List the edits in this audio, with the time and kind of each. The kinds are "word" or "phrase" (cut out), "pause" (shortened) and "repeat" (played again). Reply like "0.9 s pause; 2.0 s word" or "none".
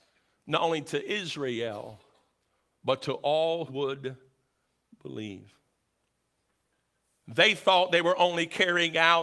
3.7 s word